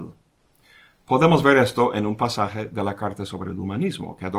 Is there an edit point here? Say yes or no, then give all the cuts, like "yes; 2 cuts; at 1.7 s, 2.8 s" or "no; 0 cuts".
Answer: no; 0 cuts